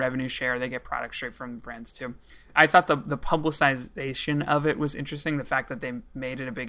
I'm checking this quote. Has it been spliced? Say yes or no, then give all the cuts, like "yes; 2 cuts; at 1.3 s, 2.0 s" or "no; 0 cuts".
no; 0 cuts